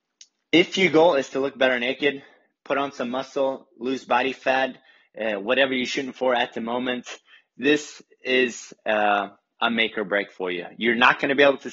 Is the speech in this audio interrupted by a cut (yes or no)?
no